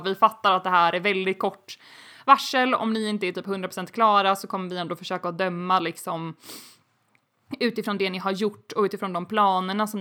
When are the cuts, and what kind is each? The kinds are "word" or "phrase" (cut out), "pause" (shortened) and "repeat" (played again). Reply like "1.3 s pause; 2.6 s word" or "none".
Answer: none